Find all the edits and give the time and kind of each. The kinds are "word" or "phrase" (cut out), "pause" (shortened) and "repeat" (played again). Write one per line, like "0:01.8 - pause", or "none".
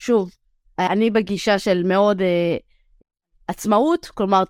none